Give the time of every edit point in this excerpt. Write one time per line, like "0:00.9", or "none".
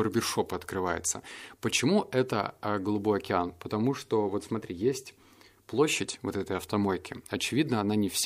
none